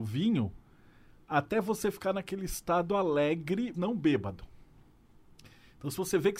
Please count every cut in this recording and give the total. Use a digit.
1